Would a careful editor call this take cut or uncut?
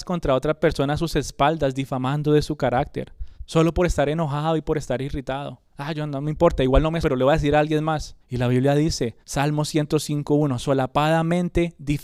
cut